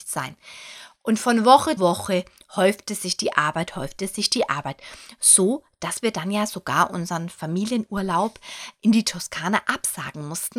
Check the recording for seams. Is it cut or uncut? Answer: cut